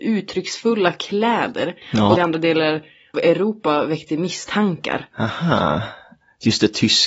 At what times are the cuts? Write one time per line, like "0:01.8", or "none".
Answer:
0:01.8
0:02.2
0:03.1